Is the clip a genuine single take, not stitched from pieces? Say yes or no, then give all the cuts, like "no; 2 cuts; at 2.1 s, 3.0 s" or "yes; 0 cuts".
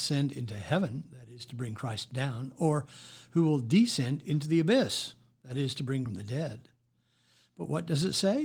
no; 1 cut; at 6.1 s